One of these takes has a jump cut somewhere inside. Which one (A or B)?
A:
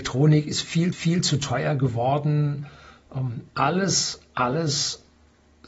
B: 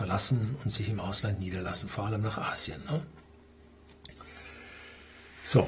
A